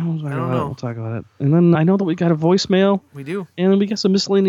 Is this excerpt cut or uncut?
cut